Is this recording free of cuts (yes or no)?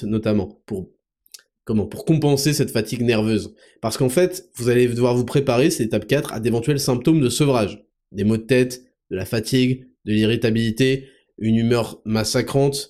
yes